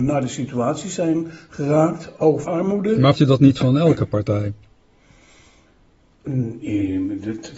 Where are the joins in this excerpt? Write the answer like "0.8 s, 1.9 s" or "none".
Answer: 2.4 s, 3.2 s